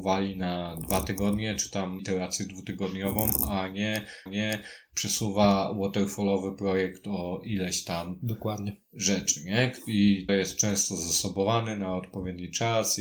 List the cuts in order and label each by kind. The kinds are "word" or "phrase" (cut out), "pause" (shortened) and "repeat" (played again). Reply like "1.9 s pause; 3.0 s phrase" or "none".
2.0 s word; 4.3 s repeat; 10.3 s phrase